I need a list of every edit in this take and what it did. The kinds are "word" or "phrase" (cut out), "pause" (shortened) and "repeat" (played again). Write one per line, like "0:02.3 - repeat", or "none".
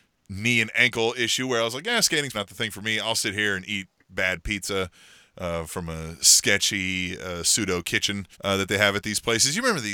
0:02.3 - word
0:08.3 - pause